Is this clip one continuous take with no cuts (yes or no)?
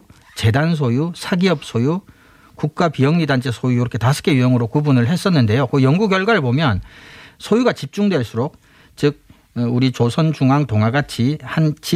yes